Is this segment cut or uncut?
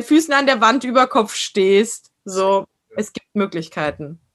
uncut